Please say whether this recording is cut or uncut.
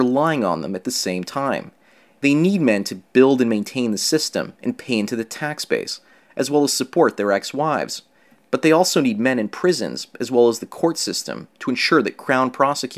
uncut